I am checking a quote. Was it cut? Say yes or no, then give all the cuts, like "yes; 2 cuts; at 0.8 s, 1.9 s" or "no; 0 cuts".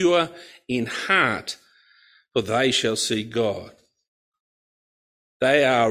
no; 0 cuts